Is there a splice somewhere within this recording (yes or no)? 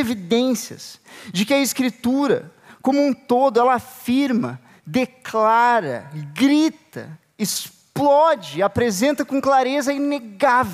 no